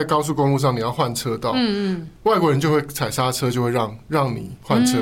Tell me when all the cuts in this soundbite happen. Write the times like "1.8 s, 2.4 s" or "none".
2.2 s